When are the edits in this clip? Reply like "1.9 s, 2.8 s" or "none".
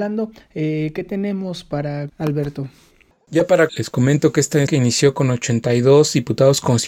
2.1 s, 3.7 s, 4.7 s